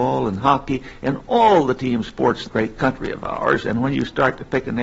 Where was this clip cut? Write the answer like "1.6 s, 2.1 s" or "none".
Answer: 2.5 s